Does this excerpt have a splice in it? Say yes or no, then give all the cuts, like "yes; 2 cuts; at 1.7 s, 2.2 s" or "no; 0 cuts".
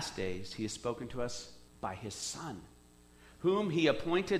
yes; 1 cut; at 1.7 s